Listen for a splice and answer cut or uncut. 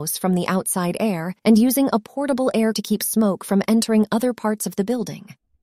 cut